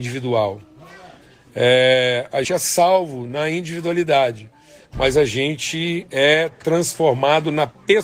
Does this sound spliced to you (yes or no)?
yes